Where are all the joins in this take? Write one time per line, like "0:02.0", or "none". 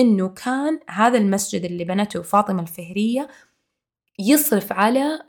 none